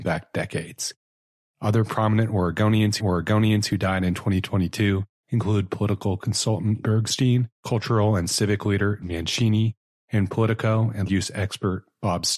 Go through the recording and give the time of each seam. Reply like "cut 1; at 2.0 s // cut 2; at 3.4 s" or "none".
cut 1; at 3.0 s // cut 2; at 6.8 s // cut 3; at 7.6 s // cut 4; at 9.0 s // cut 5; at 10.3 s // cut 6; at 11.1 s